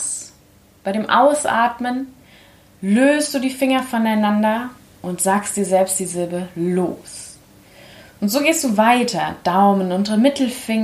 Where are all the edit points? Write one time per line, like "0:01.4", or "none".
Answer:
none

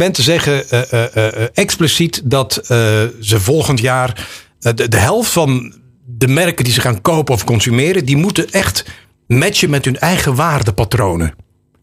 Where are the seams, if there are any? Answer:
none

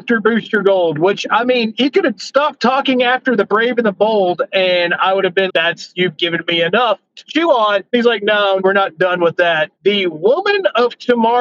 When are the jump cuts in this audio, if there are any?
0:05.5
0:07.9
0:08.6
0:09.7

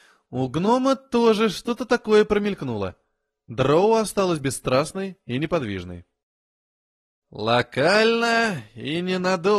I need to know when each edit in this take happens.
none

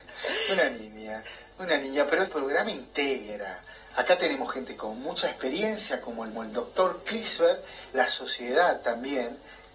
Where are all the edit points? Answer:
0:01.5
0:02.3
0:06.3
0:07.9

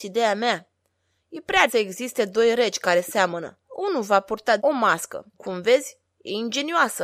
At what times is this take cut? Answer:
0:01.7
0:03.6
0:04.6
0:05.3

